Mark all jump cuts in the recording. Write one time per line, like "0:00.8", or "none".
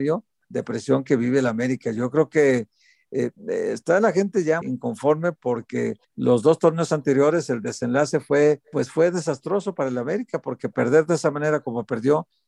0:03.4
0:04.6
0:06.0
0:08.6

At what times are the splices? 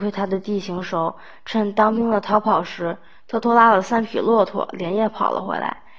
none

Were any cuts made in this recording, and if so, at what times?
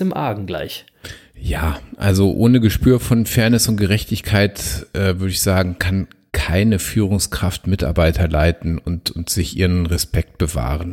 none

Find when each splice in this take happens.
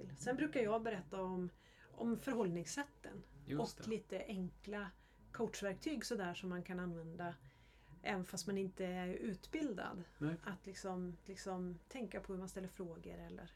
0:11.2

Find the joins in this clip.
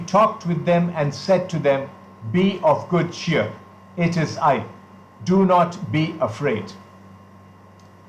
none

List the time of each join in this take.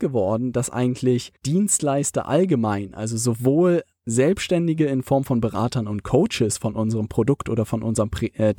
0:01.4

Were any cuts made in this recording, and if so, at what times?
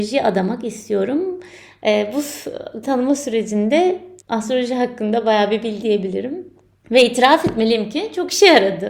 0:02.8
0:04.2
0:05.8
0:06.8

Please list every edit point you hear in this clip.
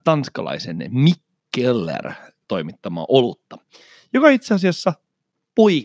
0:02.4

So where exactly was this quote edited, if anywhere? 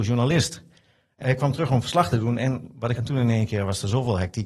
0:01.2
0:03.0

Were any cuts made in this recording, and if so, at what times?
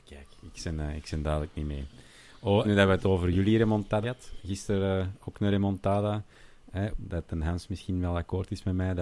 0:02.6
0:04.0
0:06.9

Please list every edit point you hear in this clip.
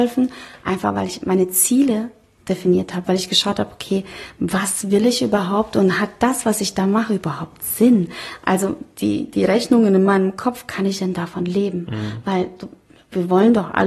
none

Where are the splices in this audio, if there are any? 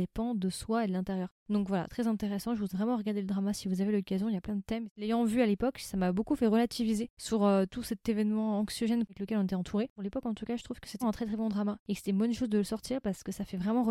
0:01.9
0:02.7
0:11.0

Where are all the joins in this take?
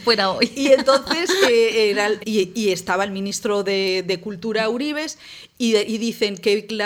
0:02.2

